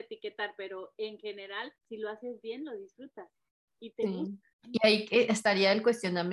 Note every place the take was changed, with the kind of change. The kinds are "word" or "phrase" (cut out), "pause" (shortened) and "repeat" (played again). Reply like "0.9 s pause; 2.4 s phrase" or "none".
1.8 s pause; 3.5 s pause; 4.5 s pause